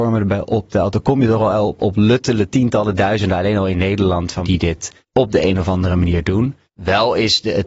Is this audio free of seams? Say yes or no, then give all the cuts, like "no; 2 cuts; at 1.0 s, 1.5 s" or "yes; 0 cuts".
no; 4 cuts; at 1.8 s, 4.4 s, 5.0 s, 6.6 s